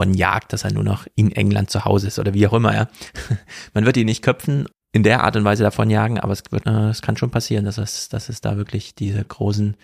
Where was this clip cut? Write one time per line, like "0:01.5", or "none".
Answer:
0:04.7
0:06.6